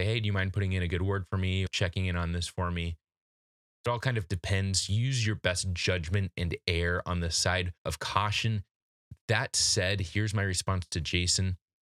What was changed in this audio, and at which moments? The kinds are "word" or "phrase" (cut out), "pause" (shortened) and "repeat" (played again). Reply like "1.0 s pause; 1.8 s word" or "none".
1.7 s word; 7.8 s pause